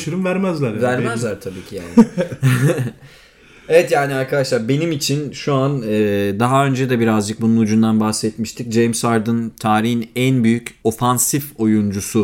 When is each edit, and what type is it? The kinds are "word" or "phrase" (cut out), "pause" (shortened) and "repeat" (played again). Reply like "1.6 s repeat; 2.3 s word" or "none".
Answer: 10.8 s pause